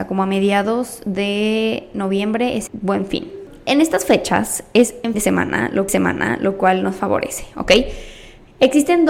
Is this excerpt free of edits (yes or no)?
no